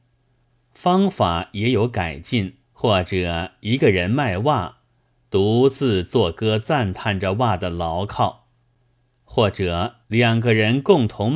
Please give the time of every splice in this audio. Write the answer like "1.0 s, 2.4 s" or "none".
2.6 s, 10.0 s